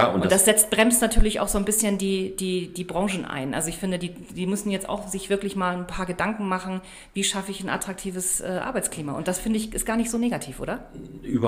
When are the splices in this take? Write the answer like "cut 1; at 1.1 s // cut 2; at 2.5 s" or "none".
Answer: none